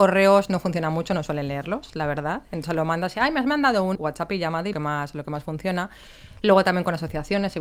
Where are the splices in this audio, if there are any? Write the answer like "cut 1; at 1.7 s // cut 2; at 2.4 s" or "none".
cut 1; at 3.9 s // cut 2; at 4.7 s